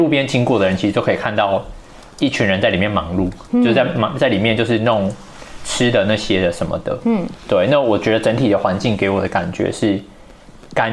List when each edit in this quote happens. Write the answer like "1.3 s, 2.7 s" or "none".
none

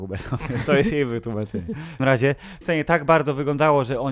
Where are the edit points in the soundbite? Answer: 2.0 s, 2.6 s

